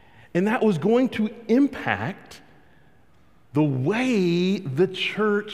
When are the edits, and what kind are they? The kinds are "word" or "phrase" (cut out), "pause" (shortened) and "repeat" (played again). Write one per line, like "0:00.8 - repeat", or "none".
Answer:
none